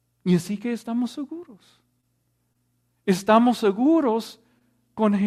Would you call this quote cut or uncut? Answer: uncut